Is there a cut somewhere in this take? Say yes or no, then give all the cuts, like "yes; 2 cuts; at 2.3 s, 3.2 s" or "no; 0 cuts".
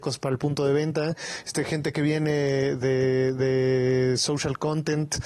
no; 0 cuts